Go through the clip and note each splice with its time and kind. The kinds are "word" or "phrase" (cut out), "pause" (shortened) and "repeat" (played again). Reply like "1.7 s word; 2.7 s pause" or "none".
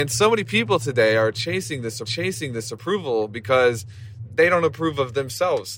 2.0 s repeat; 4.2 s word